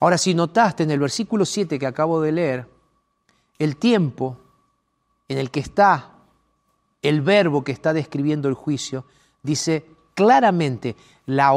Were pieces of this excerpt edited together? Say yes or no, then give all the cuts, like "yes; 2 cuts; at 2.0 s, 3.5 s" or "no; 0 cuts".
no; 0 cuts